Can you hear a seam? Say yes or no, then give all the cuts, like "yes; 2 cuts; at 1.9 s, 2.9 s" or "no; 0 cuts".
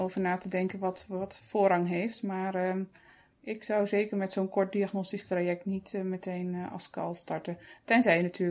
no; 0 cuts